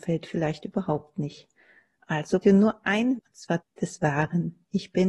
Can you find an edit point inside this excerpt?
yes; 3 cuts; at 2.4 s, 3.2 s, 3.6 s

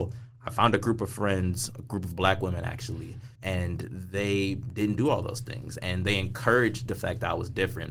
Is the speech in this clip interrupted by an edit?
yes; 1 cut; at 3.4 s

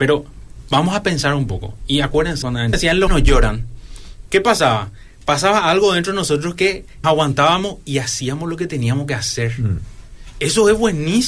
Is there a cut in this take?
yes; 4 cuts; at 2.4 s, 2.7 s, 3.1 s, 7.0 s

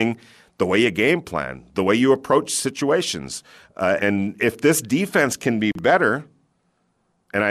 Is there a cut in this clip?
yes; 1 cut; at 4.0 s

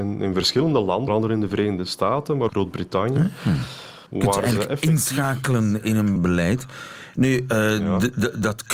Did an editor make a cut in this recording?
yes; 4 cuts; at 1.1 s, 2.5 s, 4.1 s, 6.2 s

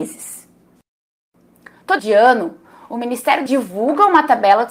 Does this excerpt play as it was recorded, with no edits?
no; 2 cuts; at 2.0 s, 3.5 s

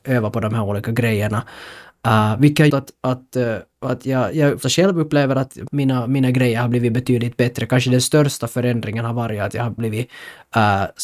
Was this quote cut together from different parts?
yes; 5 cuts; at 2.7 s, 3.7 s, 4.6 s, 5.7 s, 9.8 s

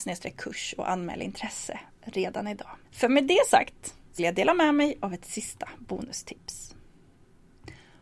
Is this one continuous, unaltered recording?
no; 2 cuts; at 2.8 s, 4.2 s

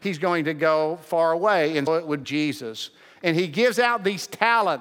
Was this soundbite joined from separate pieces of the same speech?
yes; 2 cuts; at 1.9 s, 2.2 s

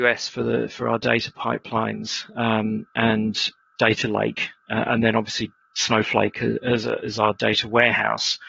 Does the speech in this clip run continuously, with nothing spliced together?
yes; 0 cuts

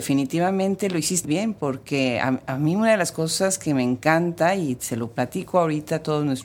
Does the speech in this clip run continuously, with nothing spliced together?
no; 1 cut; at 1.2 s

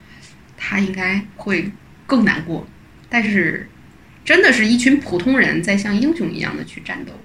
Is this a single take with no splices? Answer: yes; 0 cuts

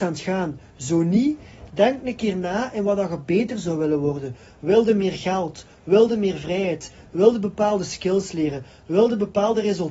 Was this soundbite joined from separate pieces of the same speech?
no; 0 cuts

